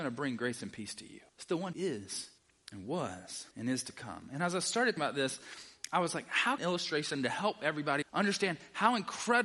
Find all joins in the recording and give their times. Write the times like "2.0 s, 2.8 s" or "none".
1.3 s, 1.7 s, 2.4 s, 3.5 s, 5.0 s, 6.6 s, 8.0 s